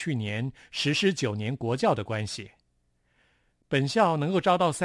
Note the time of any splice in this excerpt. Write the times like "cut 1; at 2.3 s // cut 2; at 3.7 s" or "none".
none